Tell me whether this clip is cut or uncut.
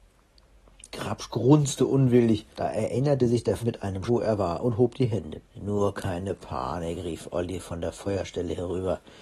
cut